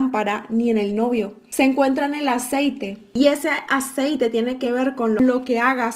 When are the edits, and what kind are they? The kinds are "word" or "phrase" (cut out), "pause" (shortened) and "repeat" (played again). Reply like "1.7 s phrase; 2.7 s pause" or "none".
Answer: none